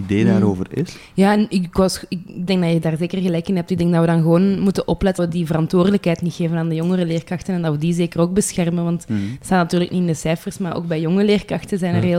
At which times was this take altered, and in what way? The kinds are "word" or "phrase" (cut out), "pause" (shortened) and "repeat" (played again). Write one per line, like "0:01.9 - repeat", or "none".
0:05.2 - word